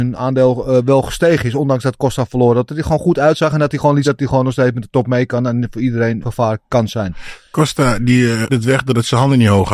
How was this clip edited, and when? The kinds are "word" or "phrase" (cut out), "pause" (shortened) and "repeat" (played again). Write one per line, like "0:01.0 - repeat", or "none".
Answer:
0:04.0 - word
0:06.2 - word
0:08.5 - word